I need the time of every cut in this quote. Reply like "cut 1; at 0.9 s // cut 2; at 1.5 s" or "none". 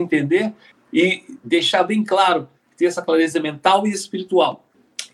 none

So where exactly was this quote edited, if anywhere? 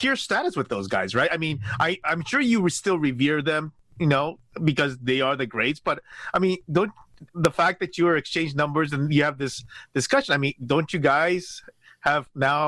cut 1; at 7.3 s

